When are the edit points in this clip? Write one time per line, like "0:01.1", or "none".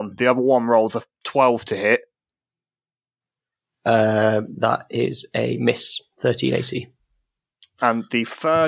none